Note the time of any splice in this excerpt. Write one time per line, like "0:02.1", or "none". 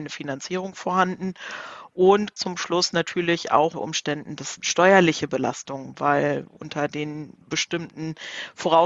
0:02.4
0:03.7
0:04.6
0:07.4

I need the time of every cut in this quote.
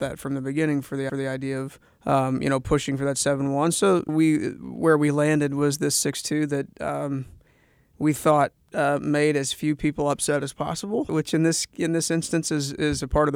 0:01.1
0:01.9
0:04.1
0:11.1

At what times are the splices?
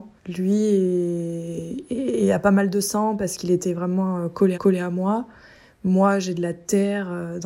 0:04.5

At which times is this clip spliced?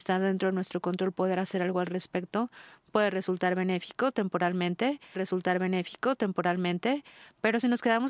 0:05.1

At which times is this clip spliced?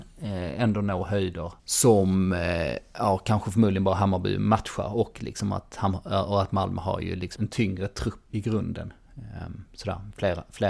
0:01.6
0:07.4
0:08.3

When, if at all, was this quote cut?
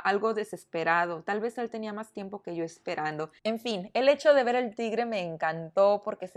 0:03.4

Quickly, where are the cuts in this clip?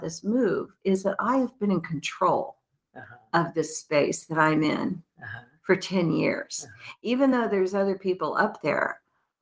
none

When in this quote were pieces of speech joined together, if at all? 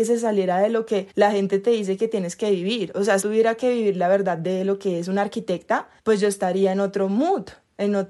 0:01.1
0:03.2
0:06.0

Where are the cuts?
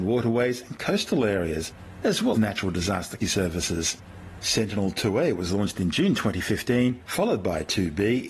0:02.3
0:03.2

